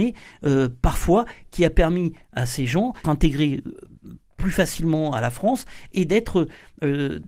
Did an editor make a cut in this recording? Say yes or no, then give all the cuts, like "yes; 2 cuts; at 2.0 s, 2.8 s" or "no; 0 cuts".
yes; 1 cut; at 3.0 s